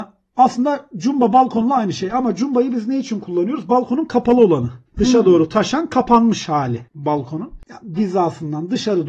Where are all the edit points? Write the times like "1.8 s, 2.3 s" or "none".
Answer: 4.9 s, 7.9 s

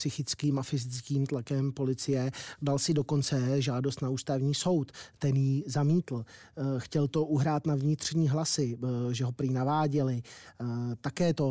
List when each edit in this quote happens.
none

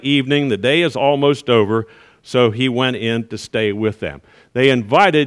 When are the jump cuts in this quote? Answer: none

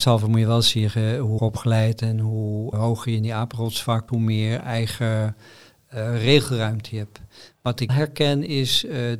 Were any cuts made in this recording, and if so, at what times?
1.4 s, 2.7 s, 4.1 s, 7.9 s

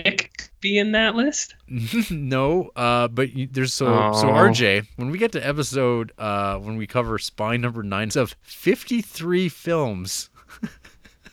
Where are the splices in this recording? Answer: 8.1 s

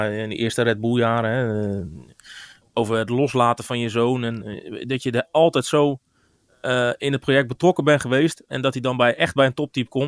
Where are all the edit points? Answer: none

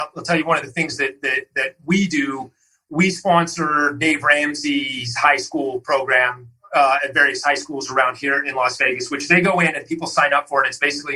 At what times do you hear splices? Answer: none

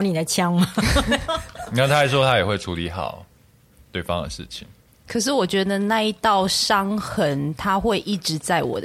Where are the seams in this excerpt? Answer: none

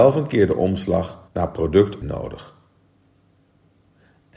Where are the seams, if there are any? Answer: 1.3 s, 2.0 s

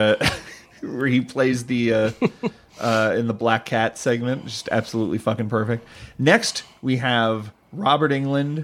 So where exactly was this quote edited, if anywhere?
none

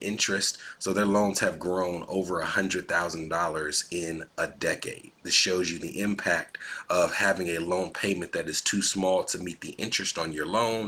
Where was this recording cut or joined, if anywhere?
none

